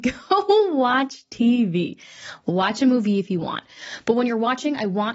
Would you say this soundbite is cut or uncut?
uncut